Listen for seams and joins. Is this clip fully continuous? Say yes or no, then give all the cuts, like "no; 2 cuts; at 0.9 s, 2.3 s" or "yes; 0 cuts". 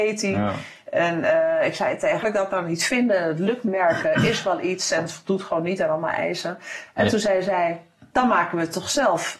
no; 2 cuts; at 2.2 s, 3.7 s